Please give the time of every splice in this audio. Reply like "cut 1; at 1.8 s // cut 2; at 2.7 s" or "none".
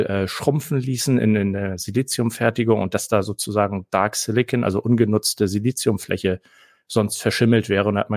none